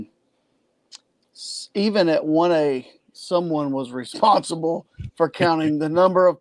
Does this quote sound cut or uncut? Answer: uncut